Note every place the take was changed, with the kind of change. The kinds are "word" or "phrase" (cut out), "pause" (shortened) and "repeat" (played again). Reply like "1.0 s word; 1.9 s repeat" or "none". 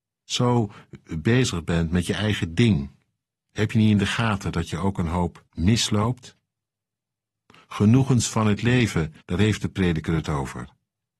5.5 s pause; 9.2 s pause